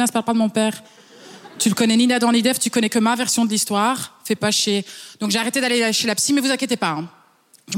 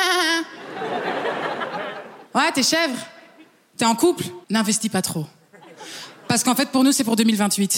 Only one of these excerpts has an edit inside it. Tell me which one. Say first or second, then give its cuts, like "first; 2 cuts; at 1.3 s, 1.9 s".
second; 2 cuts; at 2.3 s, 4.4 s